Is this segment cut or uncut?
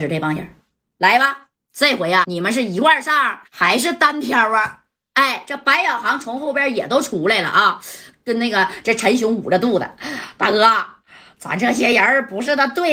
cut